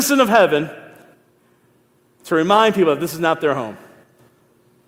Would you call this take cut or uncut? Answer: uncut